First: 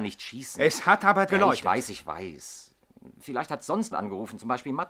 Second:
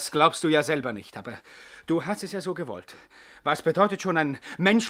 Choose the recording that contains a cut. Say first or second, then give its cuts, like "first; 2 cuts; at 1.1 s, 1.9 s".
first; 2 cuts; at 1.3 s, 3.9 s